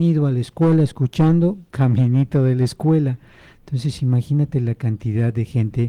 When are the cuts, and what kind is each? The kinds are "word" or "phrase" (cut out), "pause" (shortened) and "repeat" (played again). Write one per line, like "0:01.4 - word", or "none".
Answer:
0:01.7 - pause